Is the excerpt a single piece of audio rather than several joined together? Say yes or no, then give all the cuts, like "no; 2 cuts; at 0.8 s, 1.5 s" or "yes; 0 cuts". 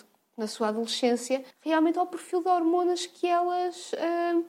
no; 1 cut; at 1.5 s